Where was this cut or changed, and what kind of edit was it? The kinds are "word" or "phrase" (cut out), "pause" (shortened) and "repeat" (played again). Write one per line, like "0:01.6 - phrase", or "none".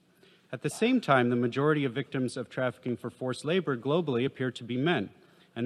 none